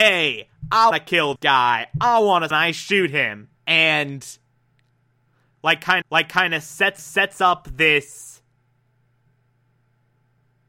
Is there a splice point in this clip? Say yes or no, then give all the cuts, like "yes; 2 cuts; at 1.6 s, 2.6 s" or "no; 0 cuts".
yes; 6 cuts; at 0.9 s, 1.4 s, 2.5 s, 3.6 s, 6.0 s, 7.0 s